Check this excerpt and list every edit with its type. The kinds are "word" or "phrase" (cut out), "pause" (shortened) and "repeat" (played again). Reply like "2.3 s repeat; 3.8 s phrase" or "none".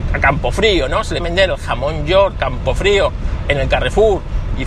1.2 s word; 2.3 s word